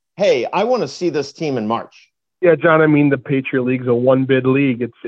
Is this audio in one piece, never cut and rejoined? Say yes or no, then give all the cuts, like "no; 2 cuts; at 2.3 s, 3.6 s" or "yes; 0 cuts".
yes; 0 cuts